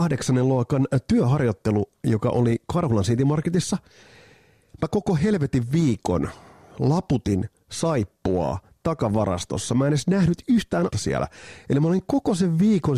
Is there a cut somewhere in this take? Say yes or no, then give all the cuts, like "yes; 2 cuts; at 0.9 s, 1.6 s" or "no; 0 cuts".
yes; 1 cut; at 10.9 s